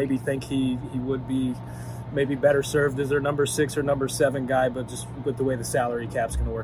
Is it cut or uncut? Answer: uncut